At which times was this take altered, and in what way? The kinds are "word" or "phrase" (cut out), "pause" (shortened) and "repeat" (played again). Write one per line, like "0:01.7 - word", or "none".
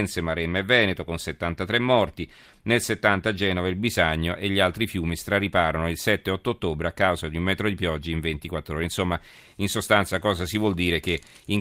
none